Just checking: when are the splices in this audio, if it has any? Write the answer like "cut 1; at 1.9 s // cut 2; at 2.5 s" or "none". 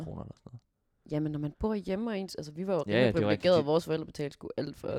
none